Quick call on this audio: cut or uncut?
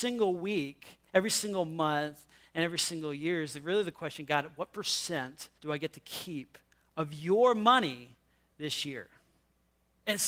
cut